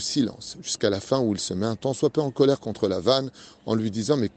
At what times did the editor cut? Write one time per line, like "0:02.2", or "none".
none